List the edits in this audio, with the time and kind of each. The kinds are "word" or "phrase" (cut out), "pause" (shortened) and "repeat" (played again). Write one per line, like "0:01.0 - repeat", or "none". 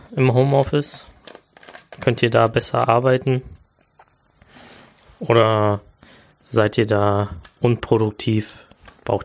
none

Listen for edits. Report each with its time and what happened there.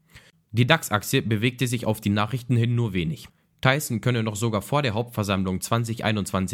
none

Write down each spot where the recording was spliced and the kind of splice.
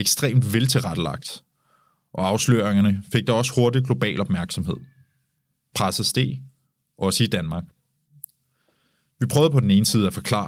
none

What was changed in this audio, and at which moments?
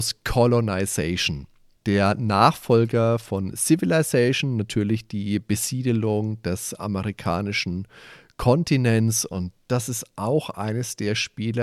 none

